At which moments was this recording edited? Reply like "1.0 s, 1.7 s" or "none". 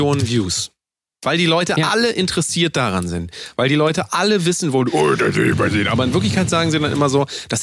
none